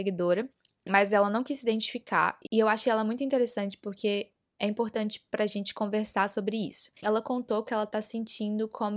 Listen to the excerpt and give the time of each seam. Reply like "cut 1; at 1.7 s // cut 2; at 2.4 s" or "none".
cut 1; at 7.0 s